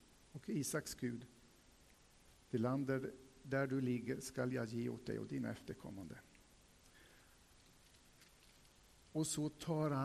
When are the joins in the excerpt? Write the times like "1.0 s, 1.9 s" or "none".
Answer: none